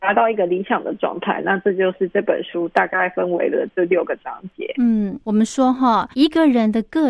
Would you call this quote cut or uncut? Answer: cut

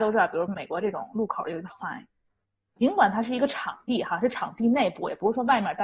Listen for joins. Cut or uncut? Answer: cut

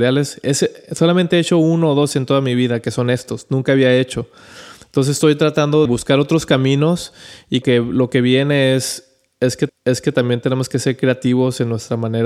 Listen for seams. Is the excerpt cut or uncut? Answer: cut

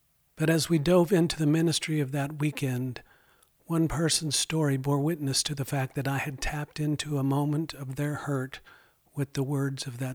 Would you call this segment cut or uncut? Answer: uncut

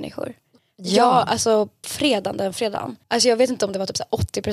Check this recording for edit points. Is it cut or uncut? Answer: cut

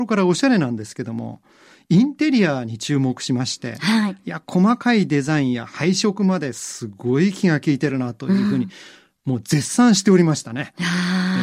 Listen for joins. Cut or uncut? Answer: uncut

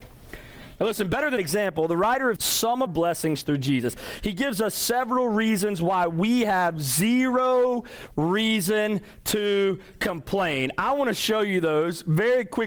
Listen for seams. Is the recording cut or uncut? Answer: cut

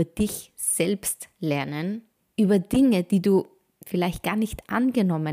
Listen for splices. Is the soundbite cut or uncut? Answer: uncut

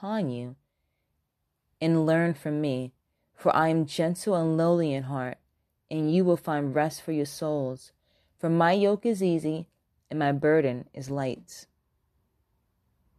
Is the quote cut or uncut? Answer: uncut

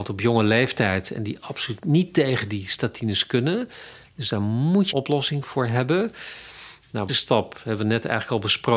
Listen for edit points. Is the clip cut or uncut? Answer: cut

